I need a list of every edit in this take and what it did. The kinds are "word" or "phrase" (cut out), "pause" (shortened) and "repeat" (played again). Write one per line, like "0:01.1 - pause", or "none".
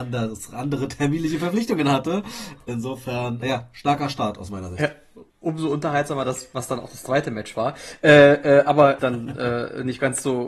0:03.4 - word
0:05.3 - pause
0:09.0 - phrase